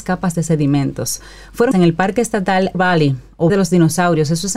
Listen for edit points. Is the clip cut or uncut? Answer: cut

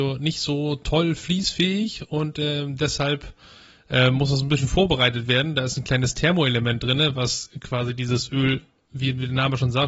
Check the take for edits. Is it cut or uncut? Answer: uncut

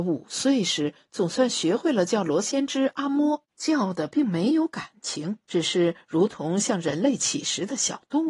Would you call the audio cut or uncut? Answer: cut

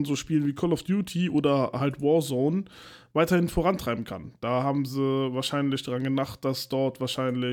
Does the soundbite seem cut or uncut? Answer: uncut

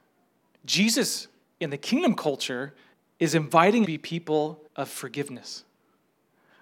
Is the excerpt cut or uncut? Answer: cut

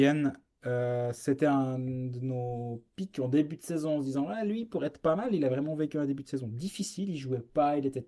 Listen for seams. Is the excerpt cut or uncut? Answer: uncut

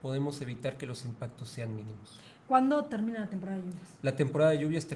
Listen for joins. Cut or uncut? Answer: uncut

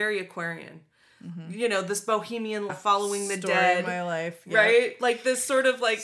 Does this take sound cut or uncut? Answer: cut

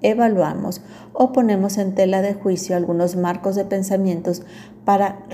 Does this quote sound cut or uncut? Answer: uncut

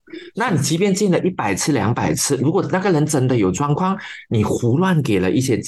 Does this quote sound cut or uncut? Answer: uncut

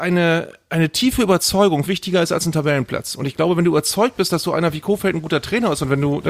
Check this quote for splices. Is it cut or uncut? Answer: cut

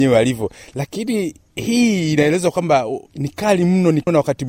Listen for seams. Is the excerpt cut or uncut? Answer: uncut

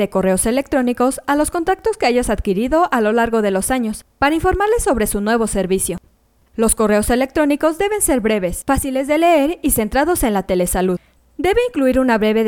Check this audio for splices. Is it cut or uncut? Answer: uncut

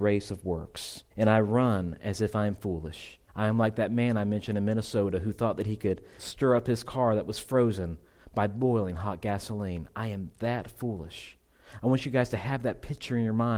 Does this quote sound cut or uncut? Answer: cut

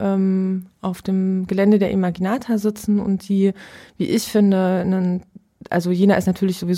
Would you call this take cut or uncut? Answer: uncut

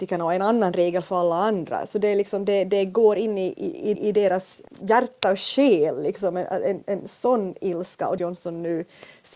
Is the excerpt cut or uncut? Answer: cut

